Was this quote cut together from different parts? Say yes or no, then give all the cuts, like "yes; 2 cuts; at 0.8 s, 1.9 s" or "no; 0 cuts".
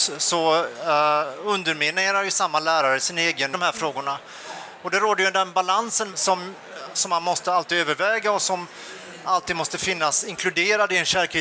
yes; 2 cuts; at 3.5 s, 6.1 s